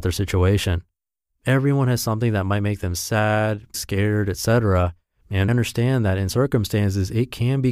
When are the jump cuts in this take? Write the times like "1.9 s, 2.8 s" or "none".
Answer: 3.7 s, 5.5 s, 6.3 s